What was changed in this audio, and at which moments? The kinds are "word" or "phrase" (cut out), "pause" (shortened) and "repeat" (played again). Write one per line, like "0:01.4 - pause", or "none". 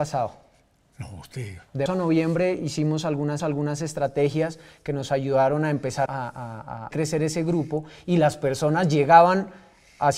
0:01.9 - word
0:03.4 - repeat
0:06.1 - word
0:06.9 - word